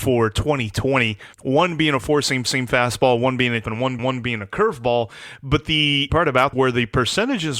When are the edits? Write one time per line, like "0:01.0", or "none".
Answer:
0:01.3
0:02.4
0:03.6
0:04.0
0:06.1
0:06.5